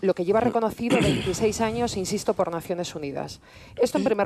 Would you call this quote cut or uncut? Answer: uncut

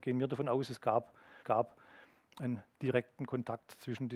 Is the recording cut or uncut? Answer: cut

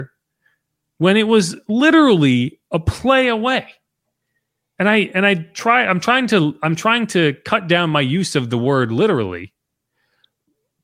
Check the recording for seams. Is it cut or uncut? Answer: uncut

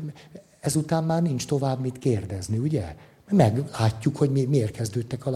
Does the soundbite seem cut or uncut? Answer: uncut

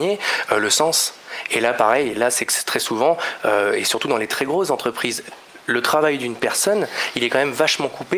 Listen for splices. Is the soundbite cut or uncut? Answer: uncut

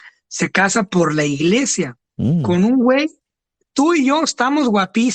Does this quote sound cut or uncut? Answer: cut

